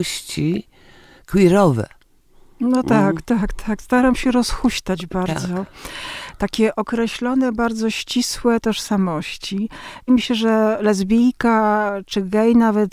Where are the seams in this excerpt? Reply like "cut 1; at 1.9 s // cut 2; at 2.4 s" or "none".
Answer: cut 1; at 8.6 s // cut 2; at 10.1 s